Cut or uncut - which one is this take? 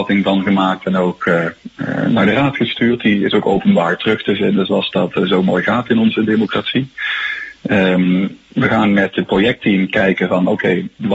uncut